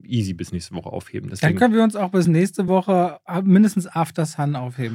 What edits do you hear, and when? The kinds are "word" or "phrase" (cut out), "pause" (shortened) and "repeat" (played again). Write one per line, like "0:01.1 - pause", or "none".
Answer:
none